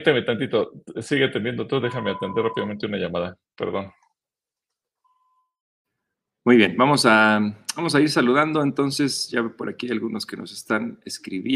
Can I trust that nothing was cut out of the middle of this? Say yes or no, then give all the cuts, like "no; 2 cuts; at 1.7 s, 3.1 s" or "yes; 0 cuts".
yes; 0 cuts